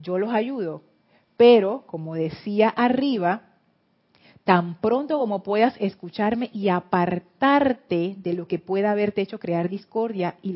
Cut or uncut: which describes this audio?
uncut